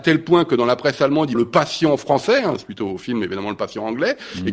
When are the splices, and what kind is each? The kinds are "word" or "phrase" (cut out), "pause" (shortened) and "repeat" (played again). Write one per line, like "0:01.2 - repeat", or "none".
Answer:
0:01.3 - phrase